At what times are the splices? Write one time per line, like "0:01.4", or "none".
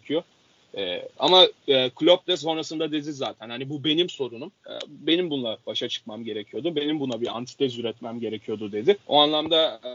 0:01.6
0:04.6
0:09.0